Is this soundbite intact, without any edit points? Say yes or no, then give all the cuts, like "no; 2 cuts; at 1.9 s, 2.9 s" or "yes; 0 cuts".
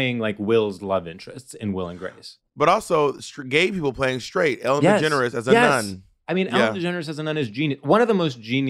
yes; 0 cuts